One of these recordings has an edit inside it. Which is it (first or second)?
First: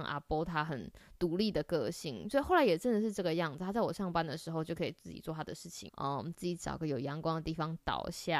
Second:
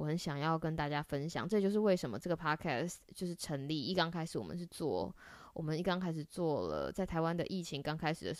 first